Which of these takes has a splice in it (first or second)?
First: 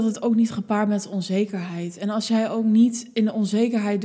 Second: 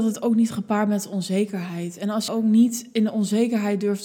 second